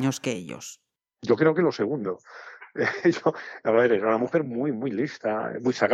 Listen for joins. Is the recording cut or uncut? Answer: uncut